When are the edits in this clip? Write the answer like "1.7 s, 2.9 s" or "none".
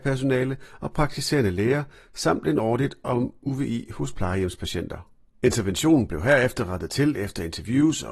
none